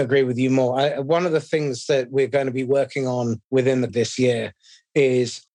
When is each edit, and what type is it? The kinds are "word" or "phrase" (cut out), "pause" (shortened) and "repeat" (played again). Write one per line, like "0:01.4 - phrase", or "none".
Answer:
0:03.4 - pause
0:03.9 - word